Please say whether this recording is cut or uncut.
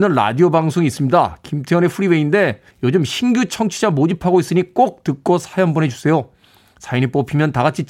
cut